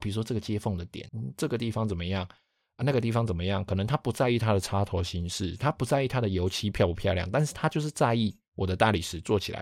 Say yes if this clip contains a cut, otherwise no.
yes